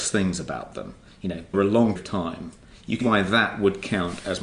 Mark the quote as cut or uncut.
cut